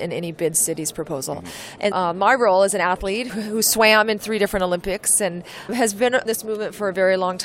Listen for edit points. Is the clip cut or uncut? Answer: cut